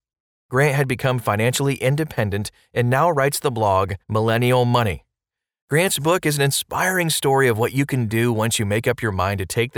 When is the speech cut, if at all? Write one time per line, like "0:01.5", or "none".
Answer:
0:04.0